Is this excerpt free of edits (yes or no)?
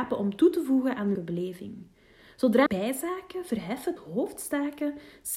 no